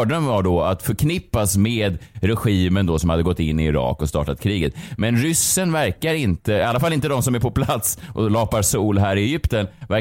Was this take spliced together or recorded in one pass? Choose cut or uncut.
uncut